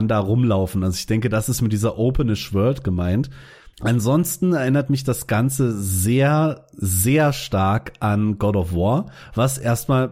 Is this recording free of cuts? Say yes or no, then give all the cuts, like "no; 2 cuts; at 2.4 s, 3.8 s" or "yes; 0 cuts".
no; 1 cut; at 3.7 s